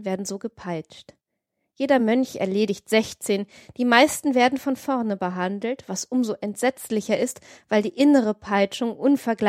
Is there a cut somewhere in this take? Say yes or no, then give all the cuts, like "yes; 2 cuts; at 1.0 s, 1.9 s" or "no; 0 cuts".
no; 0 cuts